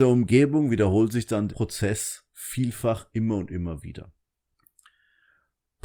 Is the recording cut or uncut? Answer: cut